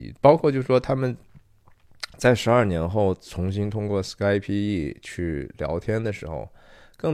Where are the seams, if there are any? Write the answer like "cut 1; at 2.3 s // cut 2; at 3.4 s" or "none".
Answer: none